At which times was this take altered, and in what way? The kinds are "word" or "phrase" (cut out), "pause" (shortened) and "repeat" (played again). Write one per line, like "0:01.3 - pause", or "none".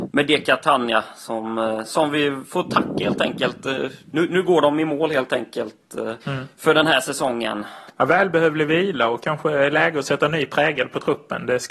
0:06.2 - pause
0:07.9 - pause